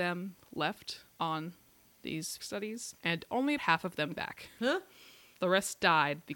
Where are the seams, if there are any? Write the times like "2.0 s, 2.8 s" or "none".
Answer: 1.1 s, 2.4 s, 3.0 s, 3.6 s, 4.1 s, 5.3 s